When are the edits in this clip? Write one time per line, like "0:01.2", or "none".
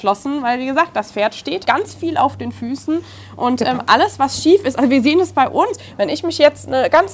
0:01.6